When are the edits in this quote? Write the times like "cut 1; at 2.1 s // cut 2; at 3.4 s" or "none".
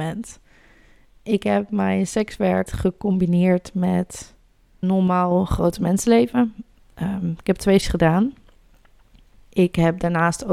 cut 1; at 2.7 s // cut 2; at 4.8 s // cut 3; at 7.8 s